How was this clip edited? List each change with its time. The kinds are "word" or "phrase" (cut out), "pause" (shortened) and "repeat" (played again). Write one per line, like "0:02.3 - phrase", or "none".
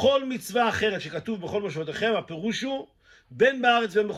none